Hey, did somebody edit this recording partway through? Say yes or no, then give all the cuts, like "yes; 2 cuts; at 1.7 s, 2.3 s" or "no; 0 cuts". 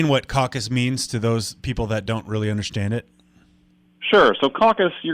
no; 0 cuts